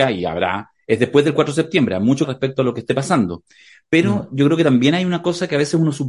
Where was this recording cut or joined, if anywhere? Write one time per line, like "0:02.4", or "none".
0:02.2